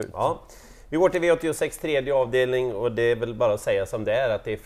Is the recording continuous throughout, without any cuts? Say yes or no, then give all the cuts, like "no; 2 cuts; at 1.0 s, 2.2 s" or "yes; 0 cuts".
yes; 0 cuts